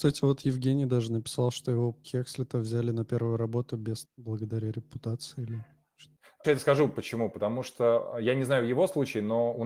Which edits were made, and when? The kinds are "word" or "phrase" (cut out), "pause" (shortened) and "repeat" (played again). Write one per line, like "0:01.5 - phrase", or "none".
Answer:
0:02.0 - word
0:04.0 - word
0:06.4 - word